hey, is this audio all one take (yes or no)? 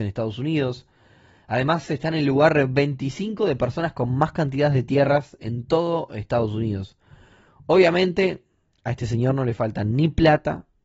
yes